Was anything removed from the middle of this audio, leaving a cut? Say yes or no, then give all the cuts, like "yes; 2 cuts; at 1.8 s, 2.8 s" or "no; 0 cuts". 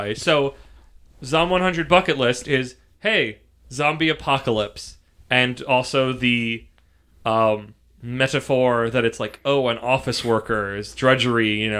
no; 0 cuts